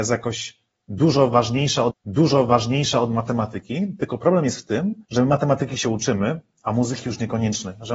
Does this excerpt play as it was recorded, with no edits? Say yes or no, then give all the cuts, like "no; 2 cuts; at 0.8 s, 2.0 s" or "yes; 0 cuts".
no; 2 cuts; at 1.9 s, 5.0 s